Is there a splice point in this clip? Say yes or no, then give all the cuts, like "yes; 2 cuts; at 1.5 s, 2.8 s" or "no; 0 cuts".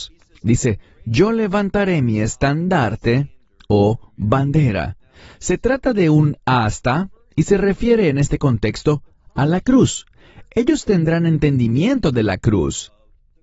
no; 0 cuts